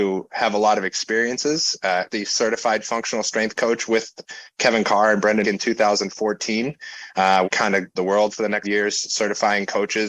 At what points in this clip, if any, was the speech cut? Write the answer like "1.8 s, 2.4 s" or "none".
2.1 s, 5.4 s, 7.4 s, 8.0 s, 8.6 s